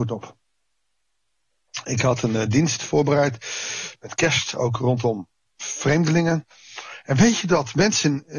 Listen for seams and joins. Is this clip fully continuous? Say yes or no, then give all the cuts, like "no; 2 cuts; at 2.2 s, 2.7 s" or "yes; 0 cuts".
yes; 0 cuts